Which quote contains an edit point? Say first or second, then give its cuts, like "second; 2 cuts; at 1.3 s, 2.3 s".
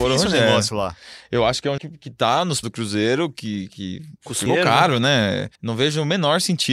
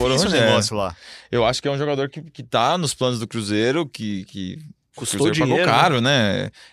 first; 5 cuts; at 1.8 s, 2.6 s, 4.2 s, 4.5 s, 5.5 s